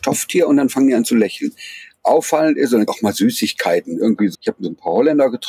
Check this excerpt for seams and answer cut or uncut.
cut